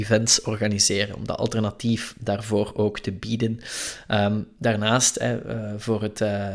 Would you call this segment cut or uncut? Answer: uncut